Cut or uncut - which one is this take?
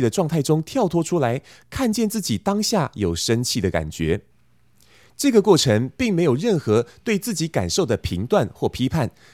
uncut